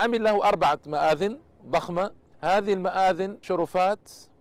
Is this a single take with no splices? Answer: no; 2 cuts; at 2.3 s, 3.4 s

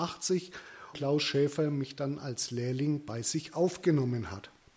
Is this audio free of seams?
no; 1 cut; at 0.9 s

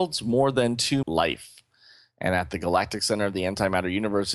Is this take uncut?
no; 1 cut; at 1.0 s

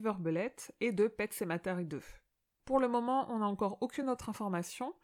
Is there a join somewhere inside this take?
no; 0 cuts

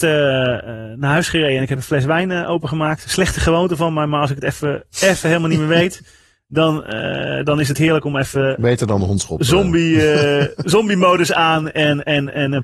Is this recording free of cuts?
yes; 0 cuts

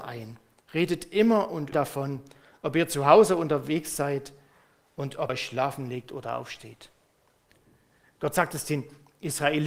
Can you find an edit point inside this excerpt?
yes; 2 cuts; at 1.7 s, 5.3 s

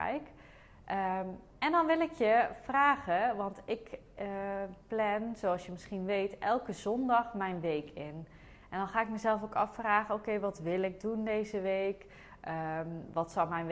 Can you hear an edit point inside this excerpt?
no; 0 cuts

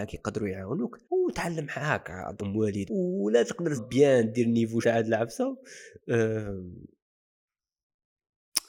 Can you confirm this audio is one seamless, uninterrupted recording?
no; 5 cuts; at 1.0 s, 2.4 s, 2.9 s, 3.8 s, 4.8 s

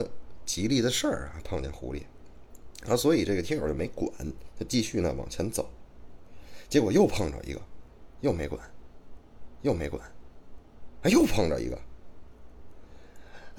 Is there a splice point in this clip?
yes; 1 cut; at 9.5 s

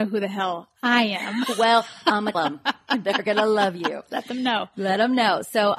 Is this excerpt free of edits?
no; 1 cut; at 2.3 s

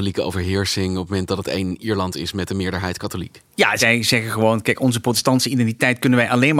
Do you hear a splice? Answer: no; 0 cuts

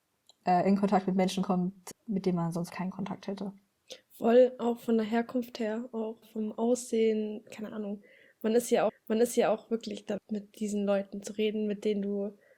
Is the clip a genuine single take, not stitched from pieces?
no; 5 cuts; at 1.9 s, 2.7 s, 6.2 s, 8.9 s, 10.2 s

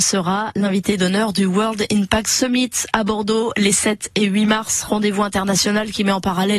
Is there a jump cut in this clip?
no; 0 cuts

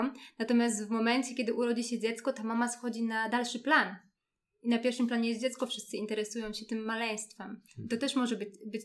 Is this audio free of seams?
yes; 0 cuts

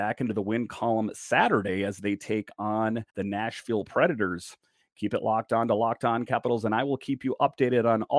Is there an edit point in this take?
yes; 1 cut; at 3.1 s

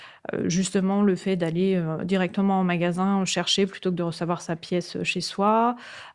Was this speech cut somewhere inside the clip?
no; 0 cuts

